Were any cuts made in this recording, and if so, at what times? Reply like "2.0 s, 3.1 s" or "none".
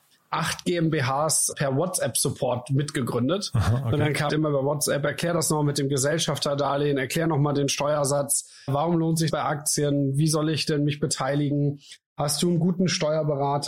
1.5 s, 4.3 s, 8.7 s, 9.3 s